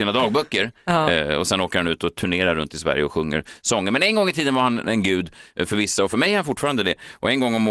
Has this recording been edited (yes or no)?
no